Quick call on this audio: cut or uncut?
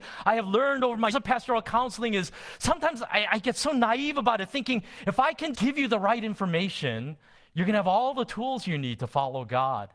cut